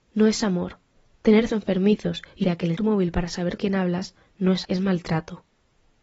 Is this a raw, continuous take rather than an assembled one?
no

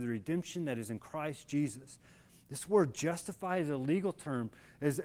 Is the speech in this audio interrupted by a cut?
no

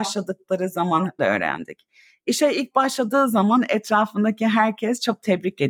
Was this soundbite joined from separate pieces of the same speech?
yes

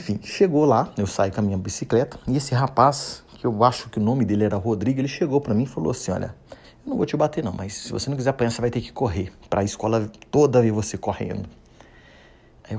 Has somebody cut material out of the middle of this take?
yes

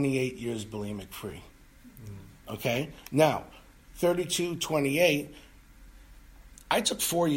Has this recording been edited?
no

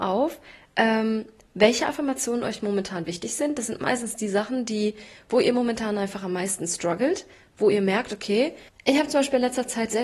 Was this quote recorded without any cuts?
yes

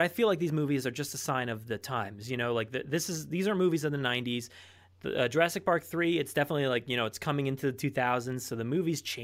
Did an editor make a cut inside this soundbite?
no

